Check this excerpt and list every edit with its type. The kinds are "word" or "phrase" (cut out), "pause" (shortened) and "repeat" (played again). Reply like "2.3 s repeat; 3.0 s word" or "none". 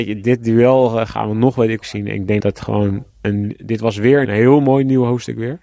1.8 s word; 2.4 s word; 3.1 s pause; 4.2 s phrase